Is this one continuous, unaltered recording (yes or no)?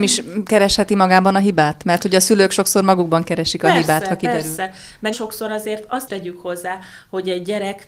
no